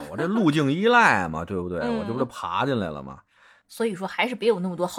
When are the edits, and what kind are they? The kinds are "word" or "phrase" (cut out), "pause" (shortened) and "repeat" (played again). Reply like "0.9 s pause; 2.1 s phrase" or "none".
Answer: none